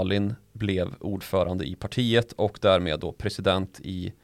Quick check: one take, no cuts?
yes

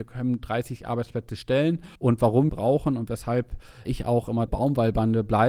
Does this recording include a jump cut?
yes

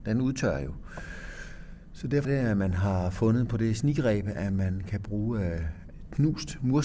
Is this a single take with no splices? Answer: no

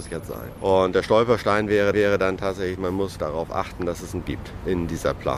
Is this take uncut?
no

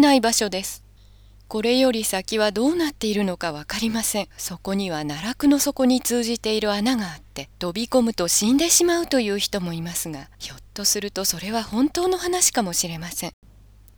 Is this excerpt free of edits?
no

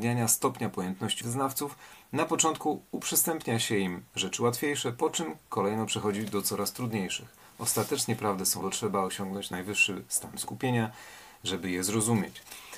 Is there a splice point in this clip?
yes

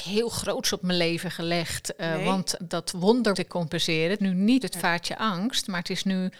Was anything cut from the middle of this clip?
yes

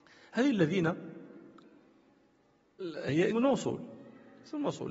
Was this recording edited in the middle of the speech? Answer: yes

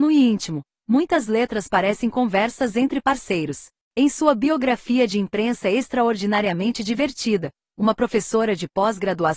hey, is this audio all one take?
yes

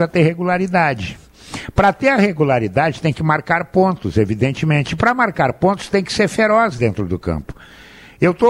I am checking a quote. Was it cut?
no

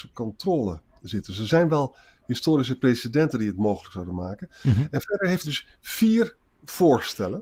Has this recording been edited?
yes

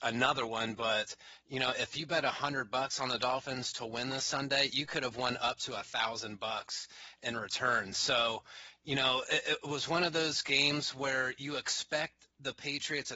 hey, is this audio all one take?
yes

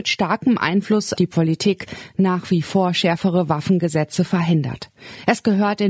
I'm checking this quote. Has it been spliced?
yes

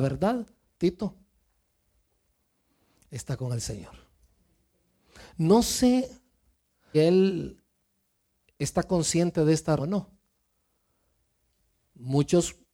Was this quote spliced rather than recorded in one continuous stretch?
yes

